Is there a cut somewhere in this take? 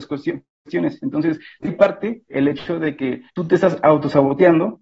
yes; 3 cuts; at 1.6 s, 2.3 s, 3.3 s

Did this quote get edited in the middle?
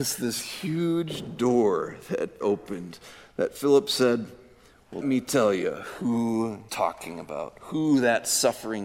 yes; 3 cuts; at 2.4 s, 5.0 s, 6.7 s

